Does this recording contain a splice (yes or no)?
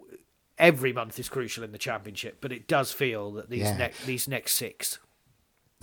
no